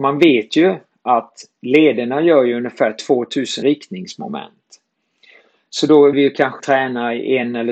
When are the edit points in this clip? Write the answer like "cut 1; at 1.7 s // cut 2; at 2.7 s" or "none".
cut 1; at 3.6 s // cut 2; at 6.1 s // cut 3; at 6.6 s